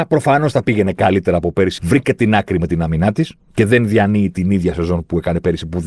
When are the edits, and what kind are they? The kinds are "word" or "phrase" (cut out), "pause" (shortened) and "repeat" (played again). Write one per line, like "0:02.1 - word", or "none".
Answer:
0:01.8 - word
0:03.4 - pause